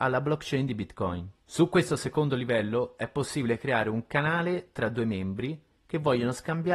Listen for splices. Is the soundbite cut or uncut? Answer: cut